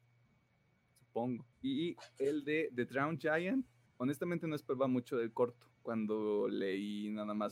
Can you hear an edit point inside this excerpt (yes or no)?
yes